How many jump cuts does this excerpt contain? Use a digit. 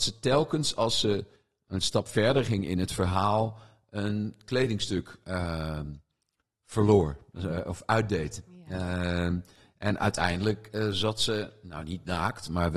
0